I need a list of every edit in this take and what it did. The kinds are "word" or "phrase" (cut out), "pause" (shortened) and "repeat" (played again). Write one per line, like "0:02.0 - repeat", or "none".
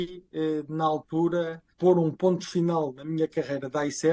0:01.7 - pause

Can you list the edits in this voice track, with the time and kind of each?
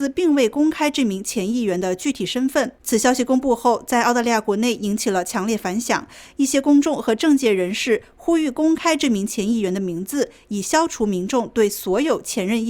0:02.8 - pause

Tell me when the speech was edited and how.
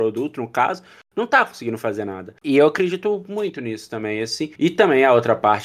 0:02.4 - pause
0:04.5 - pause

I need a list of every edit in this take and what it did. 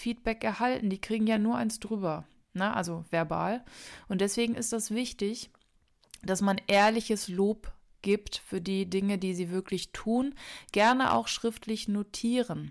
none

